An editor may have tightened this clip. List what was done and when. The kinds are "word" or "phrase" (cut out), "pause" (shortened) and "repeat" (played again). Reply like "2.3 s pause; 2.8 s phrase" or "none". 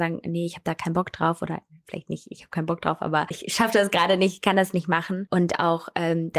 3.3 s word